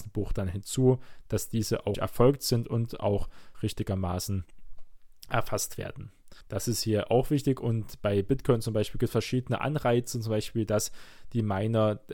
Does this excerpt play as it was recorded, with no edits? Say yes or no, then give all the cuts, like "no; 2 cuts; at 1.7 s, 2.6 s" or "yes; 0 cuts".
no; 3 cuts; at 1.9 s, 3.5 s, 6.4 s